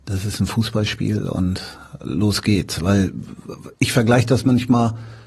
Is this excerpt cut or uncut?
cut